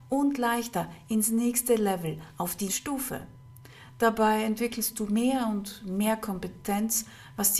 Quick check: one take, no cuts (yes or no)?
no